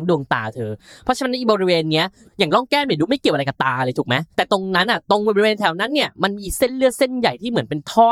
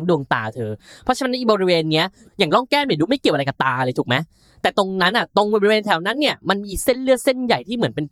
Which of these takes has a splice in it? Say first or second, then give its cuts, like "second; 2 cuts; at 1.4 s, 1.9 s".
first; 1 cut; at 4.3 s